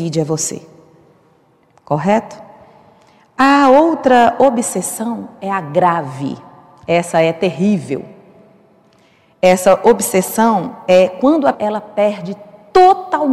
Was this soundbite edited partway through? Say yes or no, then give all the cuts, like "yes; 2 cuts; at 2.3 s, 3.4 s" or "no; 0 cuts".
yes; 1 cut; at 11.5 s